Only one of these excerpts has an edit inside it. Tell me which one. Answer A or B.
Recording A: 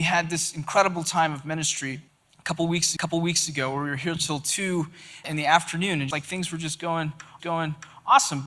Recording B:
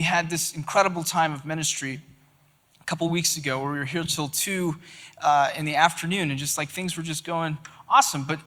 A